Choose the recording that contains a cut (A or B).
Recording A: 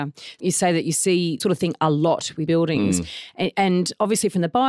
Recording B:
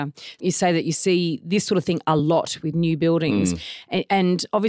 A